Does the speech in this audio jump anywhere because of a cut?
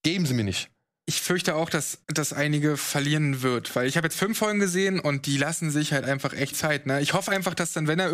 yes; 2 cuts; at 2.0 s, 6.5 s

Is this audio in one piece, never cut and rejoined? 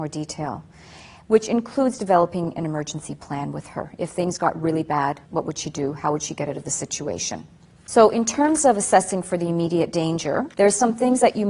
no; 3 cuts; at 5.2 s, 7.8 s, 10.5 s

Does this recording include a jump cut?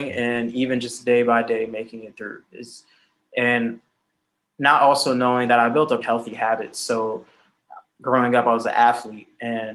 yes; 1 cut; at 6.0 s

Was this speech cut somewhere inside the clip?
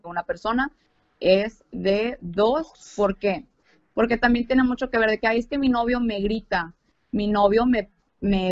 no; 0 cuts

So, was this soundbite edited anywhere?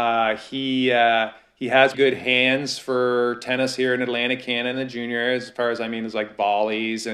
yes; 1 cut; at 1.9 s

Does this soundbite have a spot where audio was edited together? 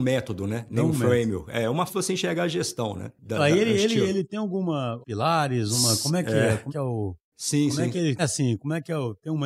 yes; 4 cuts; at 1.9 s, 5.0 s, 6.7 s, 8.2 s

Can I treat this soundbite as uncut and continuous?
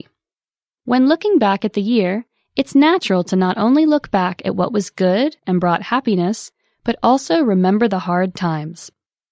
yes; 0 cuts

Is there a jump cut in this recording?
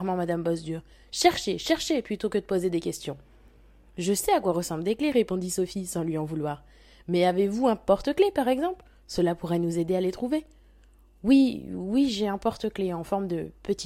no; 0 cuts

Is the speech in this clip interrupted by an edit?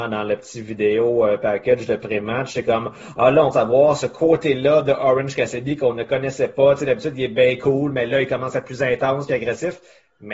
yes; 1 cut; at 3.5 s

